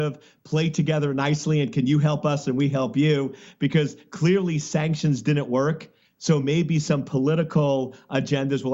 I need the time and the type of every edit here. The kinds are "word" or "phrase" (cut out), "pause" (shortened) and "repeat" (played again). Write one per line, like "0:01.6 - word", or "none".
none

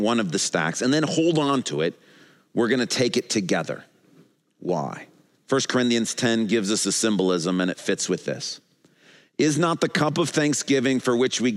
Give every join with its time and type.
none

